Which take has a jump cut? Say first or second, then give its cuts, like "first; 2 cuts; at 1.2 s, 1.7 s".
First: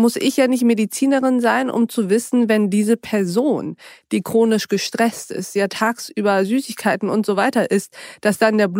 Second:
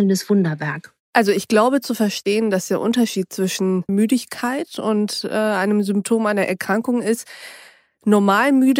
second; 2 cuts; at 1.0 s, 3.9 s